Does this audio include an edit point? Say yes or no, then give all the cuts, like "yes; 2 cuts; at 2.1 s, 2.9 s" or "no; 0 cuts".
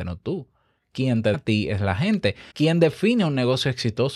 yes; 2 cuts; at 1.3 s, 2.5 s